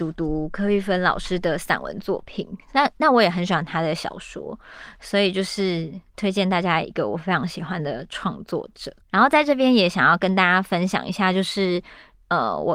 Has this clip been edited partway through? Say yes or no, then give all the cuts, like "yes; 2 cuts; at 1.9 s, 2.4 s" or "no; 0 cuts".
yes; 1 cut; at 9.0 s